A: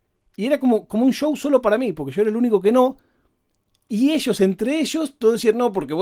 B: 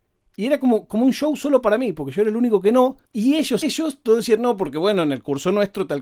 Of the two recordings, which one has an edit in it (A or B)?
B